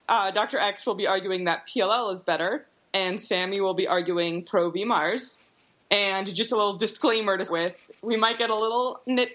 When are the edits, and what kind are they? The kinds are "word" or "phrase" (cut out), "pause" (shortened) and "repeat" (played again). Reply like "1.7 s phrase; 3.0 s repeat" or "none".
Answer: 7.5 s word